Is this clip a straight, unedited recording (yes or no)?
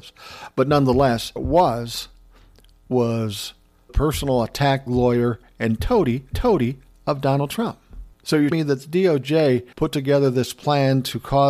no